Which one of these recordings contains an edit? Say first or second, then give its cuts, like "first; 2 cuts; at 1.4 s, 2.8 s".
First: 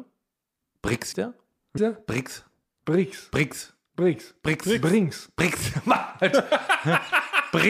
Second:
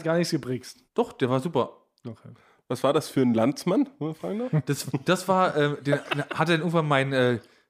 first; 2 cuts; at 1.1 s, 1.8 s